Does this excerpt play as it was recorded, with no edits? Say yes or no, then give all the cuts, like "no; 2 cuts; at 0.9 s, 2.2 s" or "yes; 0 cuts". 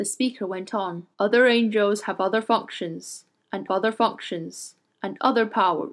no; 2 cuts; at 1.1 s, 3.7 s